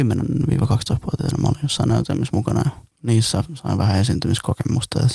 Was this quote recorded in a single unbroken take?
yes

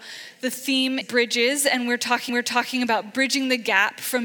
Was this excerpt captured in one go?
no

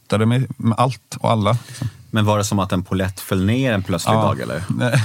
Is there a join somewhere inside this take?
no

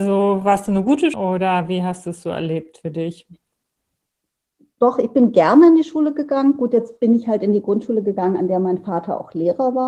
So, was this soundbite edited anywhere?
yes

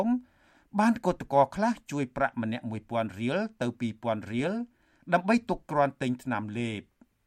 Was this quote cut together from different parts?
no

